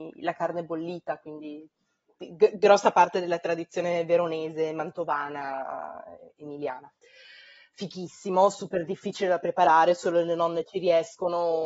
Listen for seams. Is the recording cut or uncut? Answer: uncut